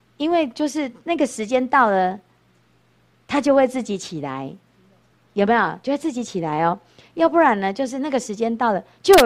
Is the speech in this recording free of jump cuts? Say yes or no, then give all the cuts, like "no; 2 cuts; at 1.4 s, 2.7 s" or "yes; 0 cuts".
yes; 0 cuts